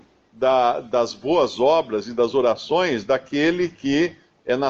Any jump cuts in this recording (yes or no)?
no